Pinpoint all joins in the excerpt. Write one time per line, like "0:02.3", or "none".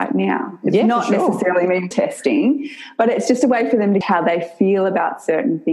0:01.9
0:04.0